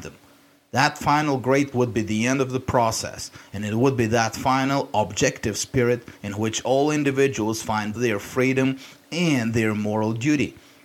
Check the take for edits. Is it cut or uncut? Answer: cut